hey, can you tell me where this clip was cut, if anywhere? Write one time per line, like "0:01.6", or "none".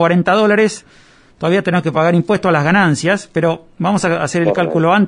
none

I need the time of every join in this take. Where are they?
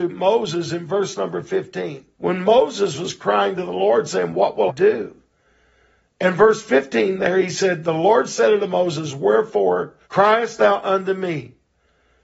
0:02.1
0:04.7
0:10.0

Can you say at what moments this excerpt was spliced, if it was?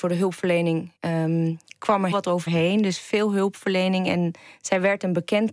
0:01.0
0:02.1
0:02.5

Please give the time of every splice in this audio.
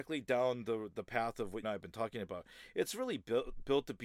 0:01.6

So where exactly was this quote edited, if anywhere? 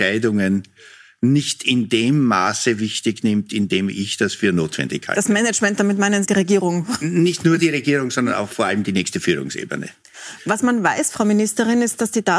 0:06.2

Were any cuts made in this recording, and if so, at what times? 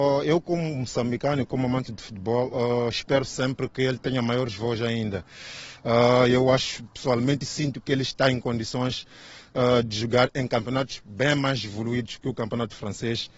none

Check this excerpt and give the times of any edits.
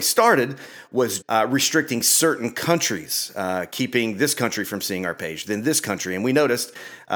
0:01.2

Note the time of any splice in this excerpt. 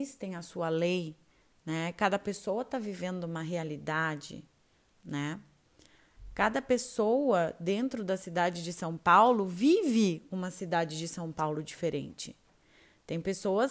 none

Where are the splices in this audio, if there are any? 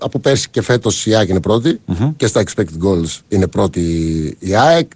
0:03.2

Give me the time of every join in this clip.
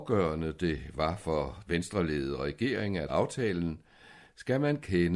0:01.7
0:03.1

